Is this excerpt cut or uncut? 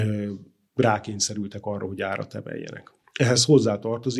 cut